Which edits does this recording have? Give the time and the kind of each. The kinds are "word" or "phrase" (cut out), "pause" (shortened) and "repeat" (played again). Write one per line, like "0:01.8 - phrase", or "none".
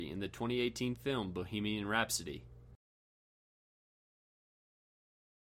none

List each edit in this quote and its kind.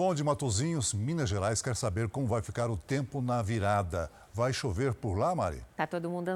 none

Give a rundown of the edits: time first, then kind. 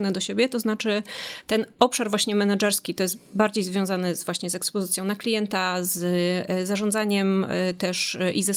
0:01.7 - pause

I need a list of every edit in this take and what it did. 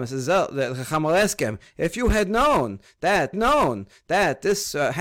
0:03.3 - repeat

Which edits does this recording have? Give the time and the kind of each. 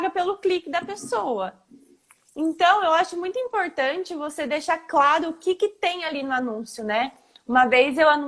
none

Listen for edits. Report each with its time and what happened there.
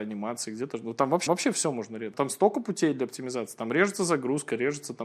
0:01.3 - repeat
0:02.1 - word

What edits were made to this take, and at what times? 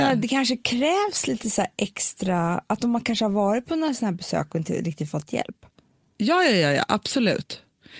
none

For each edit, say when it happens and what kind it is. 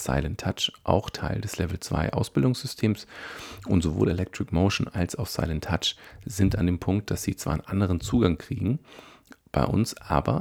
0:09.4 - pause

